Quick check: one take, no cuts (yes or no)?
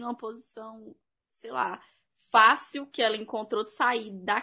yes